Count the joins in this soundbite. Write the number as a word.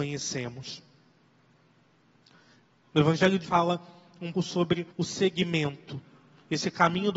three